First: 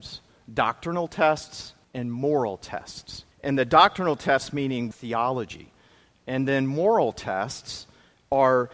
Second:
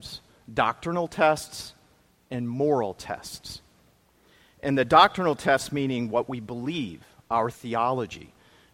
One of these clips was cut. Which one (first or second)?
first